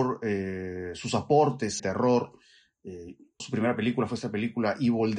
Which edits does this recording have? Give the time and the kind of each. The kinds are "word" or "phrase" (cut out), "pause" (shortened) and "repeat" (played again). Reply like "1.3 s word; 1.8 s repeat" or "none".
1.8 s phrase; 3.4 s word